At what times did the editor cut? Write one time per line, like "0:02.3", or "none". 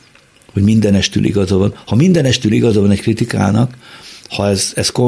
none

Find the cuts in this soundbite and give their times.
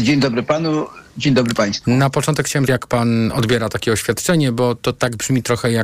0:02.7

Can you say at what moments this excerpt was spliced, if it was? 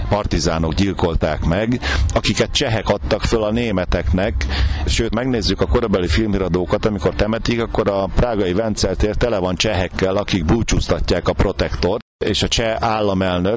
0:05.1
0:07.1

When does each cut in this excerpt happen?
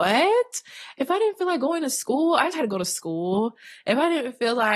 0:02.5

